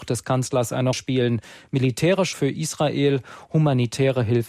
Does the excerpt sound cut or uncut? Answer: cut